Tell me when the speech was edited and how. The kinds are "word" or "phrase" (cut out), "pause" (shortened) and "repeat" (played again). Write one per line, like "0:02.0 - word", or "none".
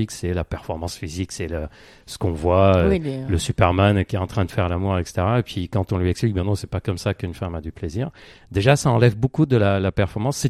none